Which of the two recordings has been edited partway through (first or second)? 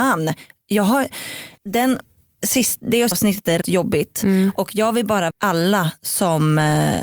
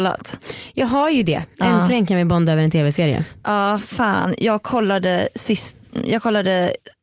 first